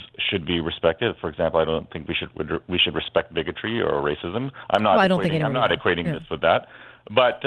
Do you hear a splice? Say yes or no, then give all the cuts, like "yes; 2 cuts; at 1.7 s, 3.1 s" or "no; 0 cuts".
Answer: no; 0 cuts